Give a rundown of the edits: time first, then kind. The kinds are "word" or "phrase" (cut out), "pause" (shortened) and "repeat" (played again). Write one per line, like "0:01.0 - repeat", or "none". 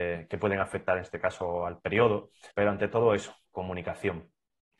0:02.5 - pause
0:03.4 - pause